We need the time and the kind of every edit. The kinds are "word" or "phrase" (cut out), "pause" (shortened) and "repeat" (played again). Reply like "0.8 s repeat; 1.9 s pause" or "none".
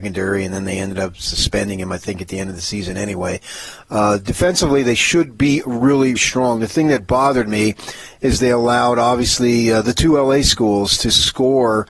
6.2 s word